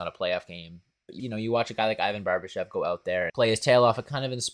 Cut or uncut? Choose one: cut